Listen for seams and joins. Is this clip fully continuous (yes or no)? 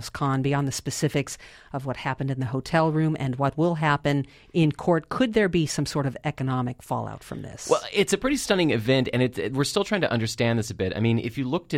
yes